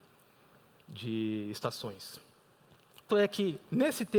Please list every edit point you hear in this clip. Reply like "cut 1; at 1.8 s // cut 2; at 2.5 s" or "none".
cut 1; at 3.1 s